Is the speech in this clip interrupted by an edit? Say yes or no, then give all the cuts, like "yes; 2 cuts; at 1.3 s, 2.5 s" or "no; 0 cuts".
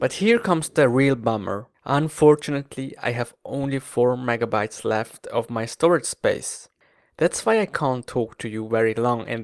no; 0 cuts